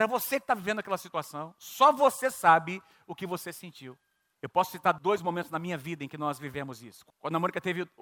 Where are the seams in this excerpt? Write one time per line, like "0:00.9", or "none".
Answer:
none